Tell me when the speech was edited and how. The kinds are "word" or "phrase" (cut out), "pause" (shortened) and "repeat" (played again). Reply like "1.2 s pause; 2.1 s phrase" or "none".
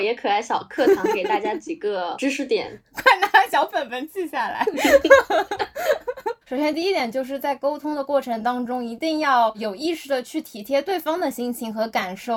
6.4 s pause